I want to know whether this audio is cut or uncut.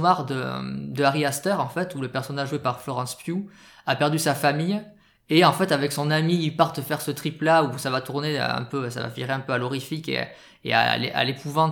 uncut